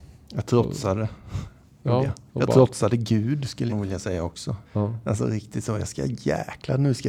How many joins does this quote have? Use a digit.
3